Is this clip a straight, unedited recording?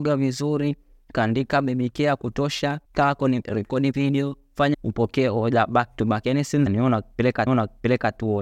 no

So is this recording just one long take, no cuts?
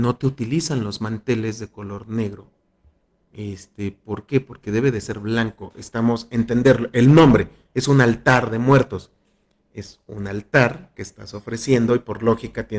yes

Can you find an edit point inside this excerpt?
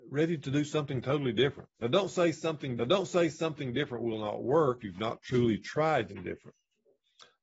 yes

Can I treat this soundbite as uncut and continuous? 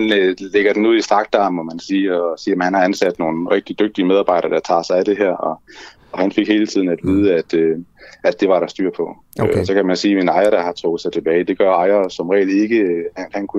yes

